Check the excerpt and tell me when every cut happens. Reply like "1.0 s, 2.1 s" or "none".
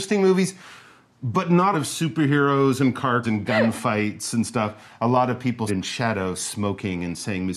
1.7 s, 3.2 s, 5.7 s